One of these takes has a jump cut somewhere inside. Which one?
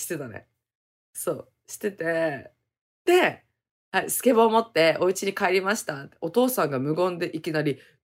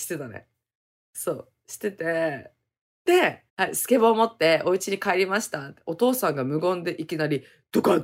second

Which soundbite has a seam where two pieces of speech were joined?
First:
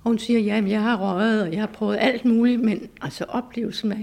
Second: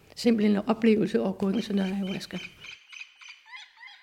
second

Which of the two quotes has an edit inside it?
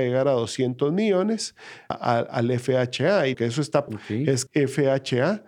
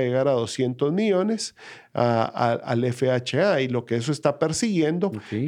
first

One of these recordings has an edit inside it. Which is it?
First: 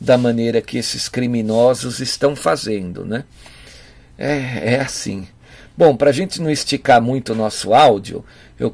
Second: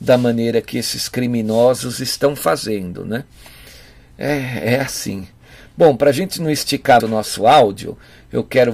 second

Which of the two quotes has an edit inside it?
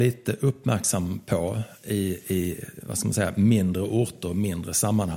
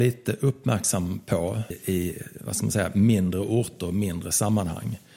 second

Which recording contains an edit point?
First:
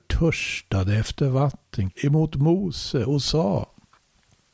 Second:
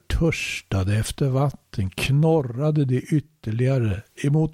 first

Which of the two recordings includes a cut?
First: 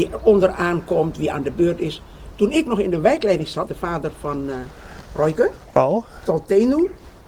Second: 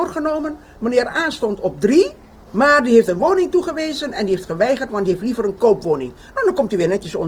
first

